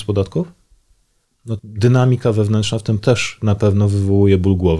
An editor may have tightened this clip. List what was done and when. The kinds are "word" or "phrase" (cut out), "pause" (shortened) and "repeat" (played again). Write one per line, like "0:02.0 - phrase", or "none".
0:01.6 - word
0:03.0 - word